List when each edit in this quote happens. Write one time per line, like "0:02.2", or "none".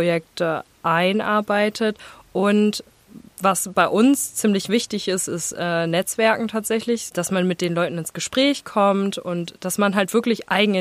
none